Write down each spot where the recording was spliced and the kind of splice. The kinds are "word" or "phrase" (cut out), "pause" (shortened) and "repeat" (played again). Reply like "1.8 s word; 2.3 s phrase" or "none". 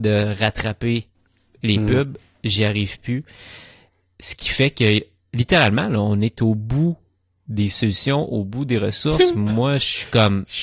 none